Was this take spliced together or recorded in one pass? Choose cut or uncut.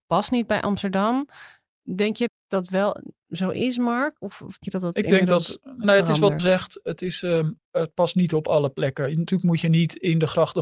cut